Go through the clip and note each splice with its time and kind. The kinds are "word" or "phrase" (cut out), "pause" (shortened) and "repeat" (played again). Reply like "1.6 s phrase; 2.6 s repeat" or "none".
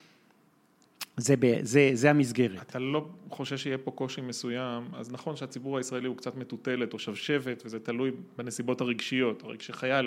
none

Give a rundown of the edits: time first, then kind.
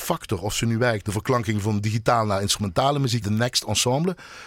1.0 s word; 3.2 s word

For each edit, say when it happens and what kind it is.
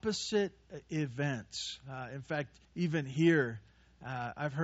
2.6 s pause

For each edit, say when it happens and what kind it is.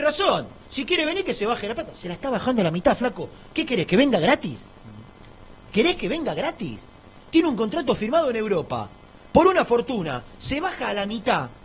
none

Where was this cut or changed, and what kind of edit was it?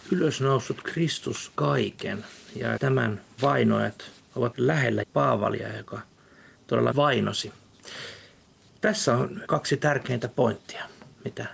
1.5 s word; 2.8 s word; 3.4 s word; 4.5 s word; 5.0 s word; 6.9 s word; 9.4 s word

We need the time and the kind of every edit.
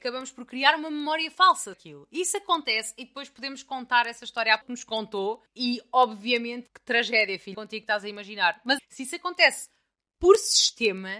1.7 s word; 4.6 s word; 5.5 s pause; 6.7 s word; 7.5 s phrase; 8.8 s word

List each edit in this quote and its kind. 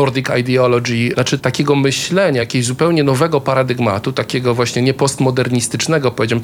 none

